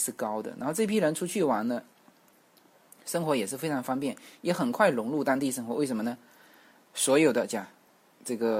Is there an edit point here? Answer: no; 0 cuts

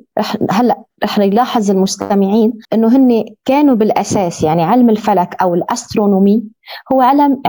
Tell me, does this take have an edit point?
yes; 1 cut; at 2.6 s

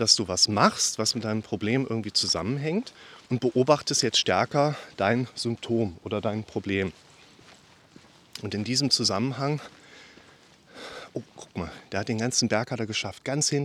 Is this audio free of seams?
no; 1 cut; at 3.2 s

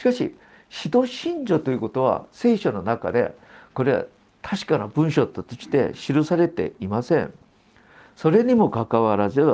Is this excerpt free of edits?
yes; 0 cuts

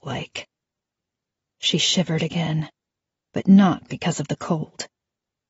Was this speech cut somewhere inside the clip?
no; 0 cuts

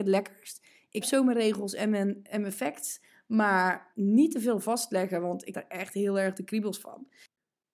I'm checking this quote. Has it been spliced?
yes; 3 cuts; at 1.0 s, 3.9 s, 5.5 s

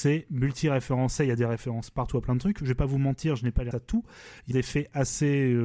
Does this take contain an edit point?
yes; 2 cuts; at 3.7 s, 4.5 s

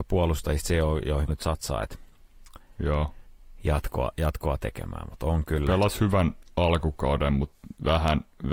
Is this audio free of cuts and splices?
no; 1 cut; at 1.3 s

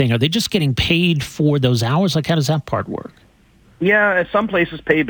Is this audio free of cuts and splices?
yes; 0 cuts

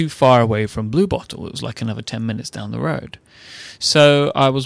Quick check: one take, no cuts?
yes; 0 cuts

